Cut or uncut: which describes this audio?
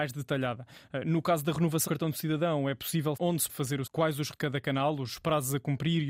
cut